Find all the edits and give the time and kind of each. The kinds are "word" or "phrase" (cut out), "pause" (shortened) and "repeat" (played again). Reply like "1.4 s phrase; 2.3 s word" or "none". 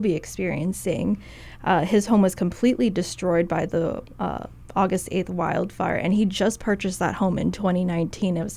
none